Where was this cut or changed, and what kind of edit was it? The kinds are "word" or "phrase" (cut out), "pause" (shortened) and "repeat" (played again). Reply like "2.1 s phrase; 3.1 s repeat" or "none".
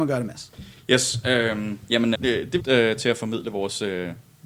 2.1 s word; 2.6 s phrase